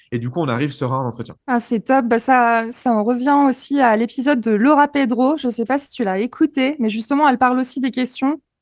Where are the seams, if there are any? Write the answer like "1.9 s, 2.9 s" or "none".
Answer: 1.4 s